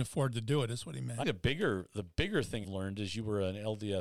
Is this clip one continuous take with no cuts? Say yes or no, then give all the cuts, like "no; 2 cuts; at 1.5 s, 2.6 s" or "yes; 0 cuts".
no; 2 cuts; at 1.2 s, 2.6 s